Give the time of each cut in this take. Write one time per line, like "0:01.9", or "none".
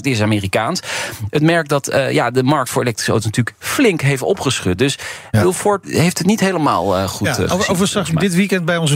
0:05.3
0:05.8